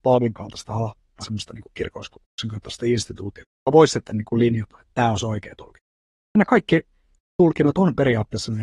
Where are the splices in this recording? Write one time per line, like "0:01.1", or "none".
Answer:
0:01.2

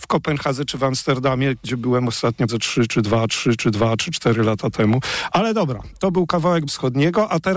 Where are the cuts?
0:02.5
0:03.3
0:06.7

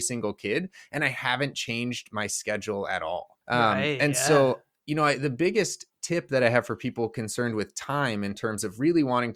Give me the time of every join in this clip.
0:03.4

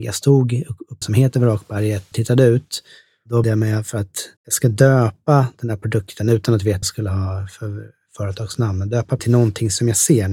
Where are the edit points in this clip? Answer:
0:01.0
0:02.1
0:03.4
0:04.4
0:06.8
0:09.2

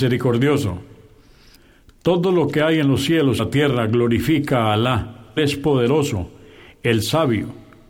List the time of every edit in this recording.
0:03.4
0:05.4

